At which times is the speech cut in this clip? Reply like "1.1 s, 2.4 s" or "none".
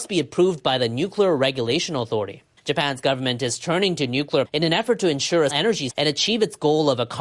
2.6 s, 4.4 s, 5.5 s, 5.9 s

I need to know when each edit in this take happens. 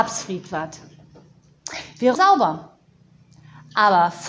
2.1 s

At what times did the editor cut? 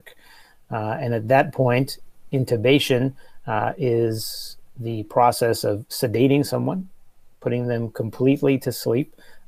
none

